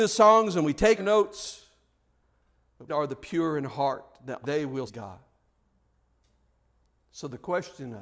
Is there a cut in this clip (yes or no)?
yes